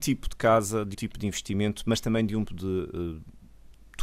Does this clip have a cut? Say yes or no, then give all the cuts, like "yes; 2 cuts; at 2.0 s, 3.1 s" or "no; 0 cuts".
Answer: yes; 2 cuts; at 0.9 s, 2.5 s